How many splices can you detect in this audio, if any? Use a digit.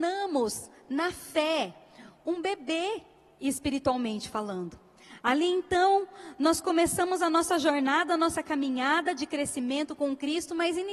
0